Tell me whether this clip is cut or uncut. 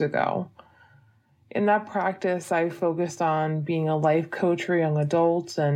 uncut